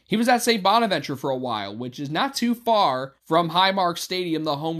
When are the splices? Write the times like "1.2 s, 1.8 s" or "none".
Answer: 3.2 s